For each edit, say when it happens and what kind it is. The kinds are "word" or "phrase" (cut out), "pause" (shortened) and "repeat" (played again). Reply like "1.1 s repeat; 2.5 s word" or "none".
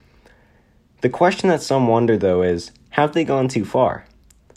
none